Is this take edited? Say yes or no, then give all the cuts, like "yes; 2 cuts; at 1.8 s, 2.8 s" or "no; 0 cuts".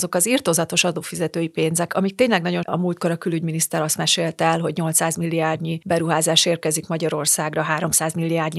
yes; 2 cuts; at 1.9 s, 2.6 s